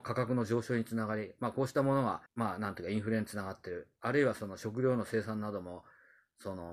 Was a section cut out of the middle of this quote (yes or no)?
yes